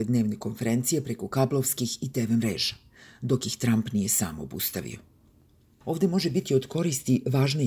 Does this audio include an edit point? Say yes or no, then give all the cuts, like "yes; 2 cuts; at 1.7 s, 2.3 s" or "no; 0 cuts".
no; 0 cuts